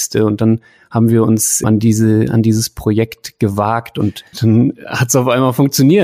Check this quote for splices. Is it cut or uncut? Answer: cut